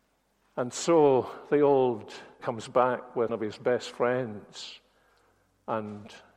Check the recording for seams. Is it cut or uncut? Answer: cut